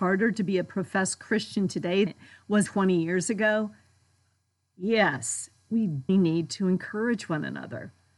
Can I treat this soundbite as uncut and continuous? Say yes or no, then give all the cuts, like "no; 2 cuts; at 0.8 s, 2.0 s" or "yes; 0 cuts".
no; 3 cuts; at 2.1 s, 2.7 s, 6.1 s